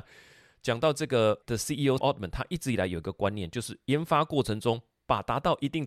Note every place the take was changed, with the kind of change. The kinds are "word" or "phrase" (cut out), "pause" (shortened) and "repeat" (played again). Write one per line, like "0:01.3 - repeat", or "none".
0:01.4 - word
0:02.0 - word